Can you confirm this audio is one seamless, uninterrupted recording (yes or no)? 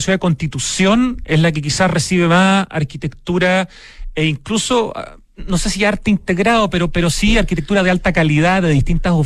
yes